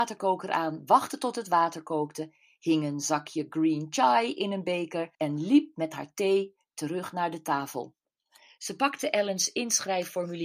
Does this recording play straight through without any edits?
no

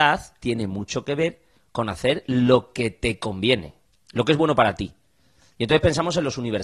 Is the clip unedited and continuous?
yes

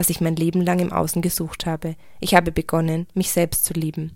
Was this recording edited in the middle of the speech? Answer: no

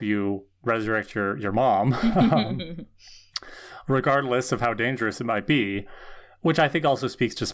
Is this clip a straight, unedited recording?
yes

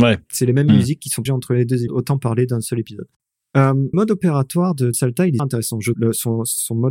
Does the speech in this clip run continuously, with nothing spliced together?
no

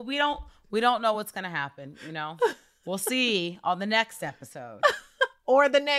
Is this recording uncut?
yes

